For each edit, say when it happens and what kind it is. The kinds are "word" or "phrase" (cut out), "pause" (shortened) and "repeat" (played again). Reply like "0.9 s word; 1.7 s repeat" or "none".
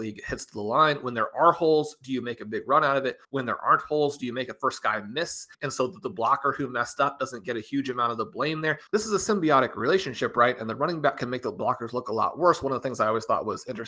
3.2 s pause; 5.5 s pause; 8.9 s pause